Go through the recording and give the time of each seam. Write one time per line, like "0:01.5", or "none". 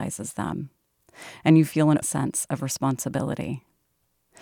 0:02.0